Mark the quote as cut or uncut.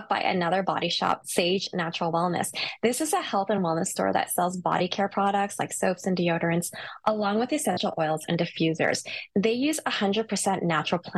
uncut